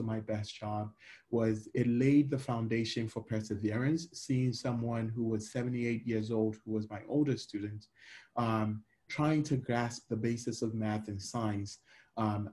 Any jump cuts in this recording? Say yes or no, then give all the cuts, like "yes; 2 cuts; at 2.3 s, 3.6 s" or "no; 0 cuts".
no; 0 cuts